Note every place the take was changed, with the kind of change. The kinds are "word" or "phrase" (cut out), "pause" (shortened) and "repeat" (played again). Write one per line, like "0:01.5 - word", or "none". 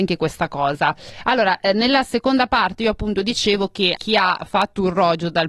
0:04.0 - word